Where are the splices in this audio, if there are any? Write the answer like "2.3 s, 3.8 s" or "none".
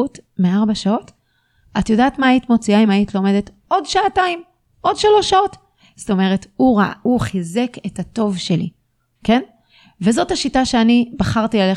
none